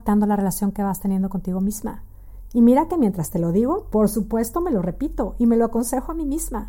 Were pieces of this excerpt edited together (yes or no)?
no